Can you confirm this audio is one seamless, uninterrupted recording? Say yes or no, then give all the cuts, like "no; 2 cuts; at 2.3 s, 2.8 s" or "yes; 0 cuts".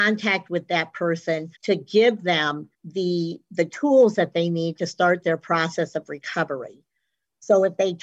no; 2 cuts; at 1.5 s, 2.7 s